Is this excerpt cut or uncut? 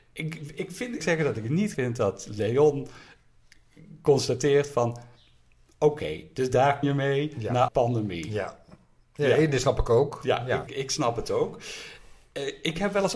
cut